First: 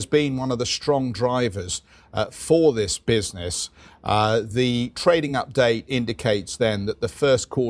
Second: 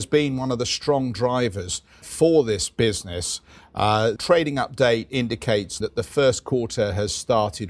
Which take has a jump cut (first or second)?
second